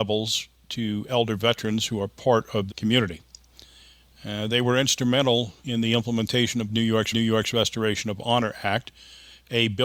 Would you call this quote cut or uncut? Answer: cut